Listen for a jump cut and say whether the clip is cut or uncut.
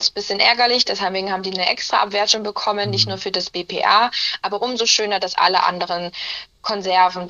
uncut